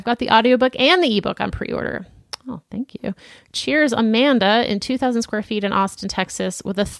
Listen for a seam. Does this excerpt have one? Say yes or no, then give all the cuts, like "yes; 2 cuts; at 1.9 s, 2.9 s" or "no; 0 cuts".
no; 0 cuts